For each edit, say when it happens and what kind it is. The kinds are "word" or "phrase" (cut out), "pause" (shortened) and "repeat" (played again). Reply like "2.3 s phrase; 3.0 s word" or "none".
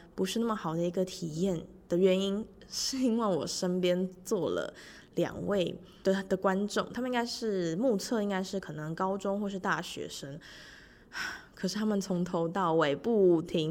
6.0 s word